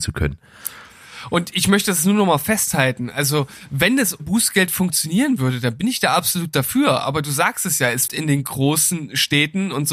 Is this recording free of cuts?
no; 2 cuts; at 4.2 s, 8.1 s

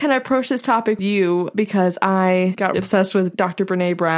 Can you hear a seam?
yes; 2 cuts; at 1.0 s, 2.7 s

